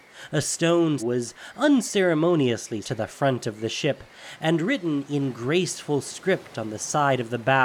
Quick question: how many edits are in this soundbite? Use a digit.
2